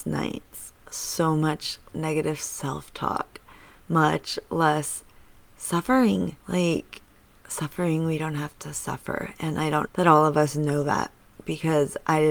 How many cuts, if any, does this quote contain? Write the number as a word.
four